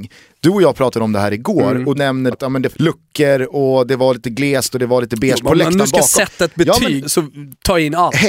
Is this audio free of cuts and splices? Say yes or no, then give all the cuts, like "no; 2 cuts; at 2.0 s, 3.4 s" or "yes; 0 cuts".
no; 4 cuts; at 1.9 s, 2.3 s, 2.7 s, 7.0 s